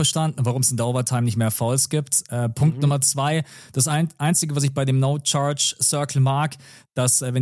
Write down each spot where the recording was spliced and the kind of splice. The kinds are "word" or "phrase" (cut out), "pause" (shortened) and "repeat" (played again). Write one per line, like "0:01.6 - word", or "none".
none